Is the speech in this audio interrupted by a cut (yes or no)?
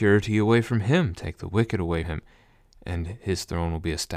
yes